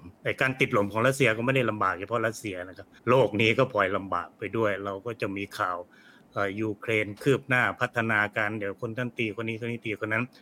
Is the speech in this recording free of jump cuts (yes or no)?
no